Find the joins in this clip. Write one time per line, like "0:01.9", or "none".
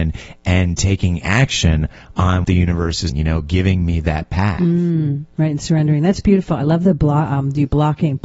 0:02.4
0:03.1

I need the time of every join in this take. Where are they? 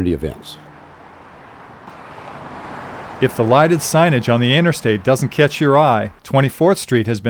0:06.2

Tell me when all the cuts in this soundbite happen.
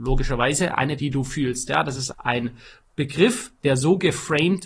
0:01.0
0:02.1

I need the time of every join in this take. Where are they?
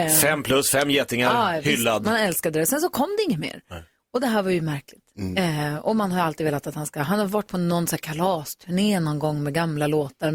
none

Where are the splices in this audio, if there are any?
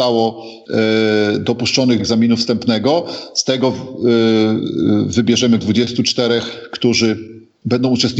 0:02.0
0:05.6

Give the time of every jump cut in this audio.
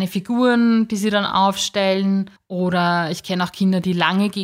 0:02.4

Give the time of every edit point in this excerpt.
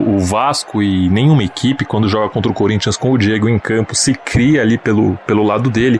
none

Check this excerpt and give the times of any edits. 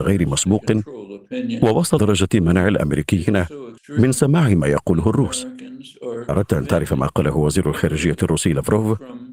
0:02.0
0:03.8
0:06.3

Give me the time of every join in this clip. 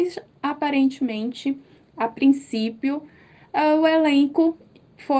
none

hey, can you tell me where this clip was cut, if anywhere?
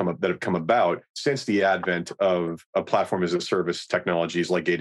none

